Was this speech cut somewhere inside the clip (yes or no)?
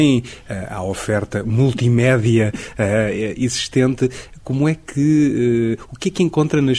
no